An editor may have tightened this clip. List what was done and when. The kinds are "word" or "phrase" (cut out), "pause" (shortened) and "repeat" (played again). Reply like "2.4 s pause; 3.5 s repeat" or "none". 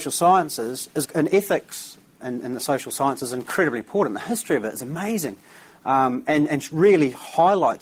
1.0 s word; 2.2 s word